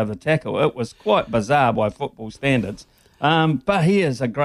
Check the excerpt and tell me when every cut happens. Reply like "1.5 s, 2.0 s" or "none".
none